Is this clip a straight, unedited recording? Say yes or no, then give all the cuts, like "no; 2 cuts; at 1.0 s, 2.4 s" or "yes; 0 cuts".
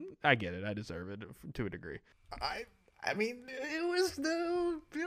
yes; 0 cuts